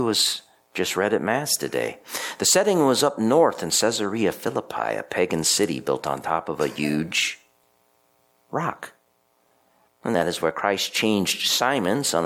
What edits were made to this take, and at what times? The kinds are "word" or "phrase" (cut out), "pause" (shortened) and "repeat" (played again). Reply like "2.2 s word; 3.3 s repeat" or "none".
none